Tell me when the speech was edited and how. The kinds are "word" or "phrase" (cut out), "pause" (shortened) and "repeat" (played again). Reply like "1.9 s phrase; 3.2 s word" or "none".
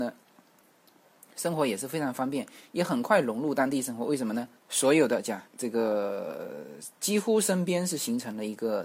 4.6 s pause; 5.5 s pause